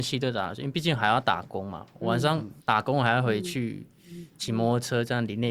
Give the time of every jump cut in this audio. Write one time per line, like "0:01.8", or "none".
0:02.6

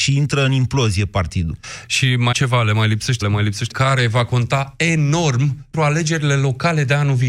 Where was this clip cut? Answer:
0:02.3
0:03.2
0:03.7
0:05.7

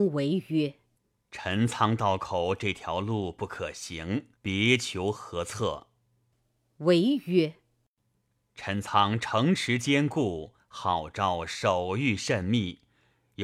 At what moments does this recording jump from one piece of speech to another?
0:04.4

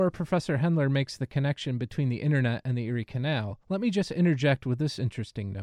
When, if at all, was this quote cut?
0:03.6

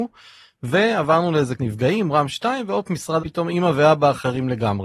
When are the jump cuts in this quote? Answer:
0:01.6
0:03.2

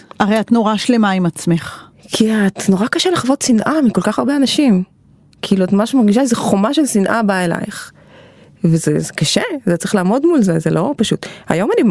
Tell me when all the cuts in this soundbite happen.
none

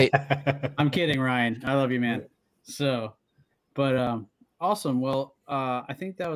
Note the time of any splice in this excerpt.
none

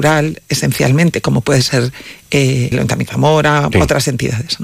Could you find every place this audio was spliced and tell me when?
0:02.7
0:03.1
0:03.7

